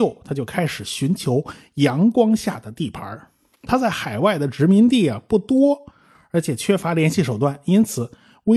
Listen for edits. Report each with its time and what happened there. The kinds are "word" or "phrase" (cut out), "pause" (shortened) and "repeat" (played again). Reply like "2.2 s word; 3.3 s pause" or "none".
none